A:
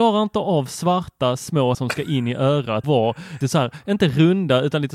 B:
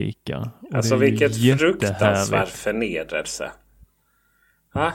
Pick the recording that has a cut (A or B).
A